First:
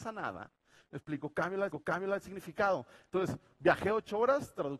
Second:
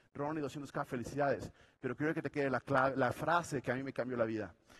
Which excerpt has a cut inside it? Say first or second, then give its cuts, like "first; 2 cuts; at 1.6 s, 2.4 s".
first; 1 cut; at 1.7 s